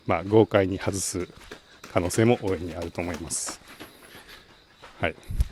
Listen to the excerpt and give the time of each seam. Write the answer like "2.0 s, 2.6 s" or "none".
none